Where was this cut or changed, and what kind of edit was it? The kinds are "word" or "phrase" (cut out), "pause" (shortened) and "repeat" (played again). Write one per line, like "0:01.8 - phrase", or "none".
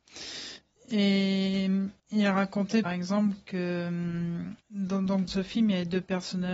0:02.0 - pause
0:02.8 - word
0:04.6 - pause
0:05.3 - word